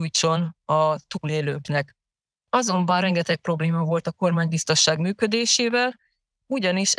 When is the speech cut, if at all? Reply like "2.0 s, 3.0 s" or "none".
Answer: none